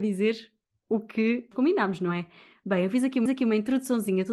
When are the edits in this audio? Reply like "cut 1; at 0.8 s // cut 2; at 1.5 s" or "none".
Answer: cut 1; at 1.5 s // cut 2; at 3.3 s

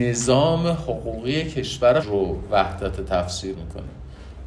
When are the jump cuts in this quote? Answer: cut 1; at 2.0 s // cut 2; at 3.5 s

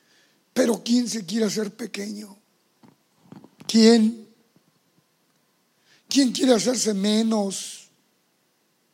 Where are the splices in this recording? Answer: none

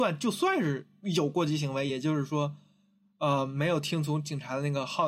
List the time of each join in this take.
none

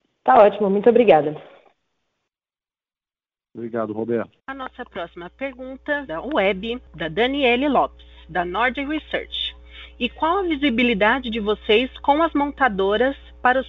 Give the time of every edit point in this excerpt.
cut 1; at 4.4 s // cut 2; at 6.1 s

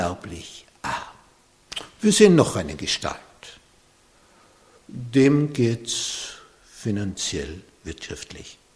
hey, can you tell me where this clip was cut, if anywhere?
none

